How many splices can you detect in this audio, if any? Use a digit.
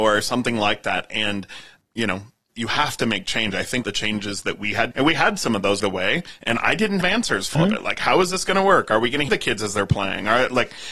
8